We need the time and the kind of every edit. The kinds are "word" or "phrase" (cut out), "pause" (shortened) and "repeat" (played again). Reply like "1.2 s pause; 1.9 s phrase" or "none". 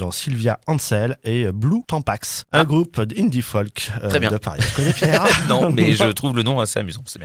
none